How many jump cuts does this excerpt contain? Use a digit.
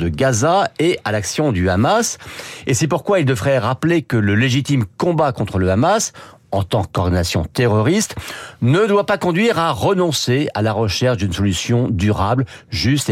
0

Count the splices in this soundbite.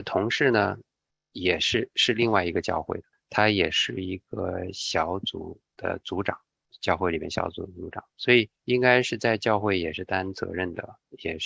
2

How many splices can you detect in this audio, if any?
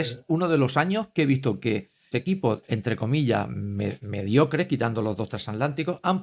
1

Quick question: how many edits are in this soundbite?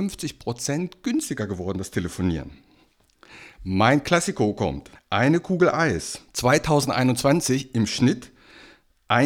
2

